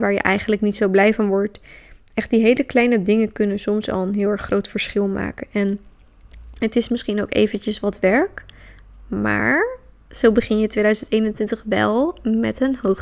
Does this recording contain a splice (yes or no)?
no